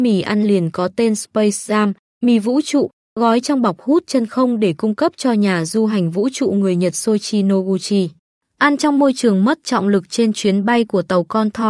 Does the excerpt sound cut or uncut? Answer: uncut